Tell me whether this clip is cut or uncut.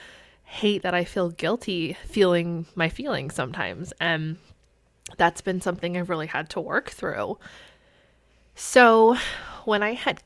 uncut